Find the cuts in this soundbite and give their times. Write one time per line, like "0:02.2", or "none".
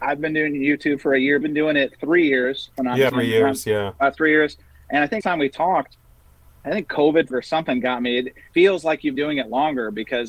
0:01.4
0:03.1
0:05.2
0:06.6
0:07.3
0:08.5
0:09.2